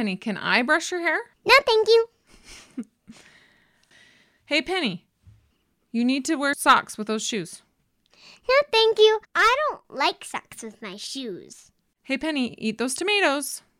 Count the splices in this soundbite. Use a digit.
4